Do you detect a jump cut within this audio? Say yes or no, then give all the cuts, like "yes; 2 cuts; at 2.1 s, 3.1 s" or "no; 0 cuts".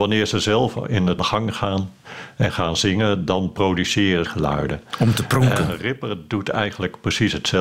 yes; 2 cuts; at 1.2 s, 4.3 s